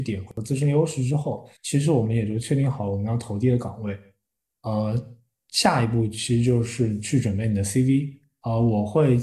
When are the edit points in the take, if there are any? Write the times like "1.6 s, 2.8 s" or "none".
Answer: 1.6 s